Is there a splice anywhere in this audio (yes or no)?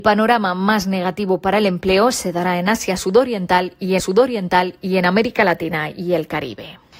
yes